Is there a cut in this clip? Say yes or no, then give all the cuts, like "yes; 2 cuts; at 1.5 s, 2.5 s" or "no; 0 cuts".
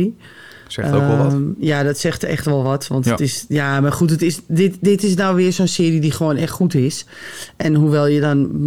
no; 0 cuts